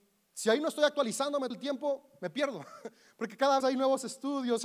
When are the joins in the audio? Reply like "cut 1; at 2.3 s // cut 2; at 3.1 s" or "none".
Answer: cut 1; at 1.5 s // cut 2; at 3.6 s